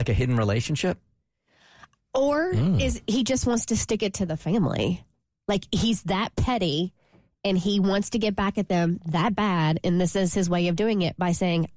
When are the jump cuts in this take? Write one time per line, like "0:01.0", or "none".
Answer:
none